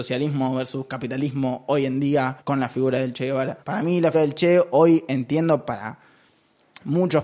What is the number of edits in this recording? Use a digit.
3